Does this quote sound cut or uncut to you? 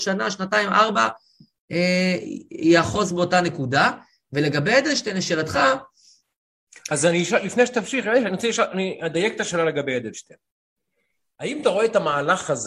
uncut